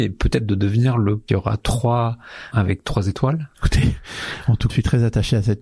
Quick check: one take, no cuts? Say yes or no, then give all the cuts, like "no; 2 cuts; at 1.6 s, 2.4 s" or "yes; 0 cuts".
no; 4 cuts; at 1.3 s, 2.5 s, 3.5 s, 4.7 s